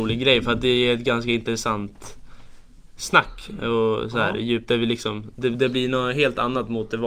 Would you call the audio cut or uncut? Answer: uncut